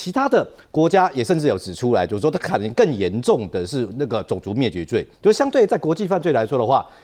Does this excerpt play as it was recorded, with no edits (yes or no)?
no